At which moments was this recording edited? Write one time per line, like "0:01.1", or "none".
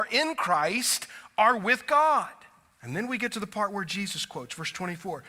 0:02.7